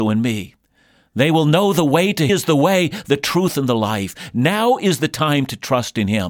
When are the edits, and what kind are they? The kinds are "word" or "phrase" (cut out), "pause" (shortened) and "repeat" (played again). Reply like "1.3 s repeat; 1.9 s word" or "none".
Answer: 2.3 s phrase